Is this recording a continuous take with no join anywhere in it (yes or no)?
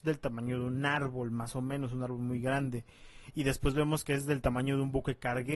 yes